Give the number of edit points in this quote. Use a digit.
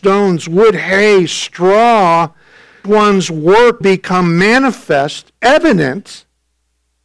2